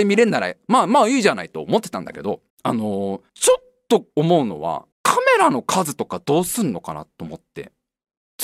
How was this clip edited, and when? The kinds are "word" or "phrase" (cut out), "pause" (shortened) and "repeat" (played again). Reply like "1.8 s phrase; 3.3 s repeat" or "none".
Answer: 2.5 s pause; 3.3 s pause; 4.1 s pause; 4.9 s pause